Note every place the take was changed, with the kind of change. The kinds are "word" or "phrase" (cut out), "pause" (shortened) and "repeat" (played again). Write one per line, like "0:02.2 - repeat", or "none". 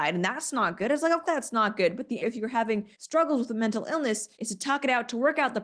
0:01.2 - word
0:02.2 - word
0:02.9 - pause
0:04.3 - pause